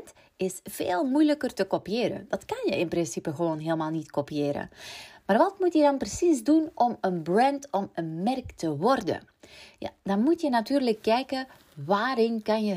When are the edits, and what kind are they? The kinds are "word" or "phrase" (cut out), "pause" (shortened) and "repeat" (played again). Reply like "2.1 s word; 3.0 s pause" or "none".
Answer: none